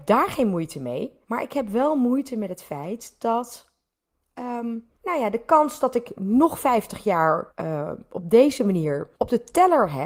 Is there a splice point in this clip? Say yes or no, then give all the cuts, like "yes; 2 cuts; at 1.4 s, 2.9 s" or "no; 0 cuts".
yes; 4 cuts; at 1.2 s, 5.0 s, 7.5 s, 9.1 s